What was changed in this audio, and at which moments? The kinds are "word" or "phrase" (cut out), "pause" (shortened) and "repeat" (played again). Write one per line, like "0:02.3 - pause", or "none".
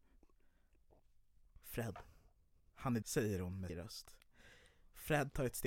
0:03.0 - word
0:03.7 - word